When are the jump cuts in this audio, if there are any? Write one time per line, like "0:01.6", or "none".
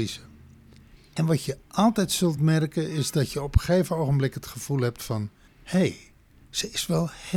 none